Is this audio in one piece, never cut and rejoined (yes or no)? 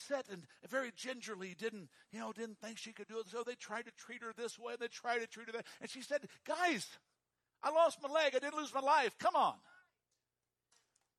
yes